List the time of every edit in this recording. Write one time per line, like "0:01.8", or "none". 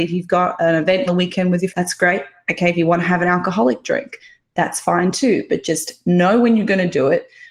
0:01.1
0:01.7